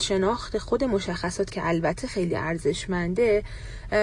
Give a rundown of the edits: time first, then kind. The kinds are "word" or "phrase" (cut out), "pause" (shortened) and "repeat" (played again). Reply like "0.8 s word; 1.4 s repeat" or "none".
1.5 s word